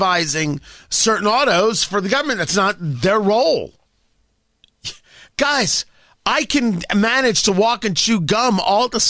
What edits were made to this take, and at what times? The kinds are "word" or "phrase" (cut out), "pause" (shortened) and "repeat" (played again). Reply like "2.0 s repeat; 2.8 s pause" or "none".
none